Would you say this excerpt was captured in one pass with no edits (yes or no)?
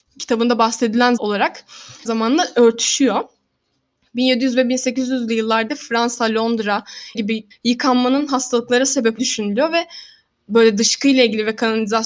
no